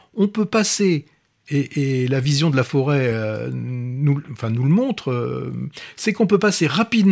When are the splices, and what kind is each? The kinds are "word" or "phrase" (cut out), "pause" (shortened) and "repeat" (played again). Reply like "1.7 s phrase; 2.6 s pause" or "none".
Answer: none